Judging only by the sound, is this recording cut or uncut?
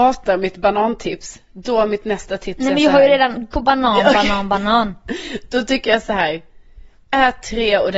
cut